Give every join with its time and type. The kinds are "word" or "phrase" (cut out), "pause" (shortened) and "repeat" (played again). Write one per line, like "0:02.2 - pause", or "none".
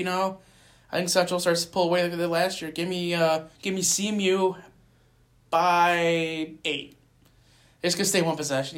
0:03.5 - pause
0:06.6 - pause

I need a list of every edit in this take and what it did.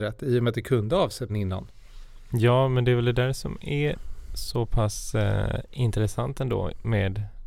0:01.3 - word

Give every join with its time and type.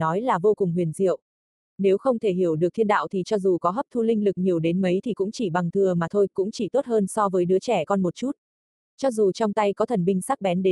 none

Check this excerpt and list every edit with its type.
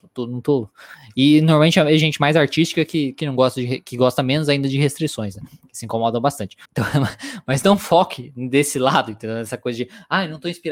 0:06.6 - pause

